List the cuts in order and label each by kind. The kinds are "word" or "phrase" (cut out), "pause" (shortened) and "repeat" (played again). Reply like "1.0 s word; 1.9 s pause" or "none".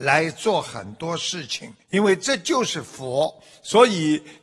1.8 s pause